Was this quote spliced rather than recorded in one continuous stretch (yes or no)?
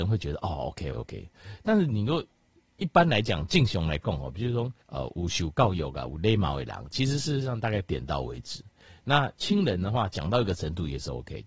yes